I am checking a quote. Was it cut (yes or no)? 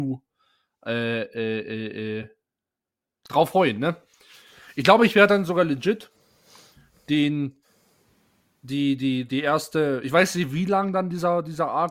no